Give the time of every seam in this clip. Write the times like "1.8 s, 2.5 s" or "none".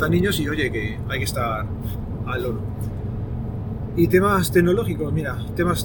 none